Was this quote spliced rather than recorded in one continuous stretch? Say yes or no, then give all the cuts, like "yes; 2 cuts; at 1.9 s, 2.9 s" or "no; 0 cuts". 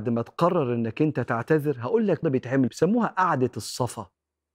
yes; 2 cuts; at 2.2 s, 2.7 s